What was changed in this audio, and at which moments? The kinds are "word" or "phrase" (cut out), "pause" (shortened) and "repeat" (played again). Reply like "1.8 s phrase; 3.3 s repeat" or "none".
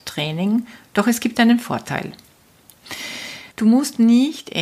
3.5 s pause